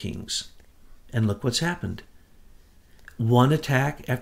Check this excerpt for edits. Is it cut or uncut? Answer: uncut